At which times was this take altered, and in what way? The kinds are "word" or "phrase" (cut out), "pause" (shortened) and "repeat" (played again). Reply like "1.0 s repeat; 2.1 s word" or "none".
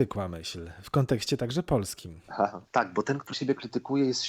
2.2 s pause; 3.3 s word